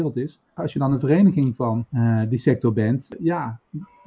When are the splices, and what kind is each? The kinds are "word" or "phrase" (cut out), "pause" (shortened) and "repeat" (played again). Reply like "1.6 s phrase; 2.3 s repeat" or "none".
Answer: 1.9 s pause